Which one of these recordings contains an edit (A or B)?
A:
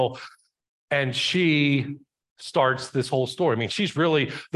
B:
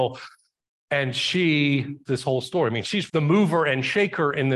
B